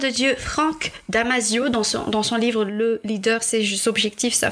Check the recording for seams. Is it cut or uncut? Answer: uncut